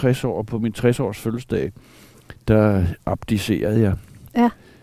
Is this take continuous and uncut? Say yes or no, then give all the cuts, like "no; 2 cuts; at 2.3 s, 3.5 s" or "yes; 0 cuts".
yes; 0 cuts